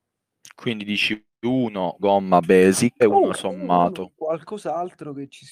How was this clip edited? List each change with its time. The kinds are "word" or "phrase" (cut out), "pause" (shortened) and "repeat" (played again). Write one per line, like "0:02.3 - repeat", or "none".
0:02.0 - word
0:03.0 - word
0:03.3 - word